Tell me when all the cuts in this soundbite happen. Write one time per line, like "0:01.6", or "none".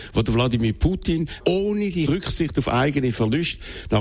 0:01.4
0:02.1